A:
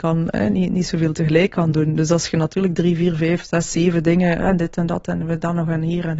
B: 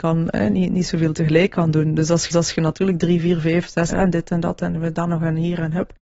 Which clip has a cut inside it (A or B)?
B